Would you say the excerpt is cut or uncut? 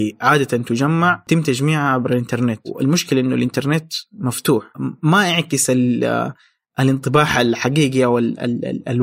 uncut